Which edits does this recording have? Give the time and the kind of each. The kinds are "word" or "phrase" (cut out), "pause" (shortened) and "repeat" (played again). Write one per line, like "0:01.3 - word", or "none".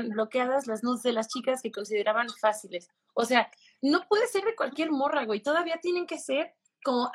none

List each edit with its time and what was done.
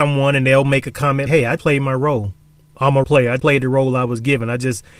0:01.3 - word
0:01.6 - word
0:03.0 - word
0:03.4 - word

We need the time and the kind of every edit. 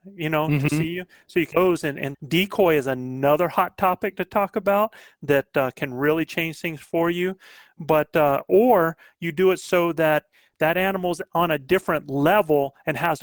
0:01.5 - word
0:02.1 - phrase

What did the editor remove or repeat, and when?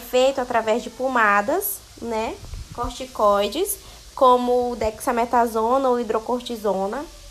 0:01.9 - pause

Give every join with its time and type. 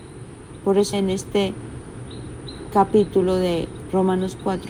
0:00.9 - word

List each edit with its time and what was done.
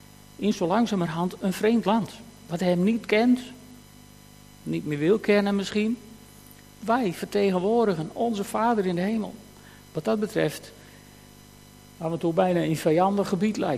none

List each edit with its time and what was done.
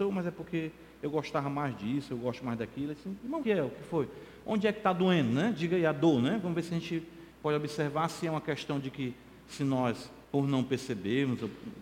0:03.4 - phrase
0:10.2 - pause

